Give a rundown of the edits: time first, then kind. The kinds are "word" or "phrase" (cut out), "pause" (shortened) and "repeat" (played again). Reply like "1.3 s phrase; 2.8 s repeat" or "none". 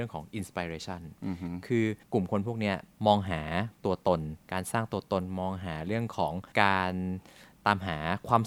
2.0 s pause; 2.9 s pause; 4.4 s pause; 6.5 s pause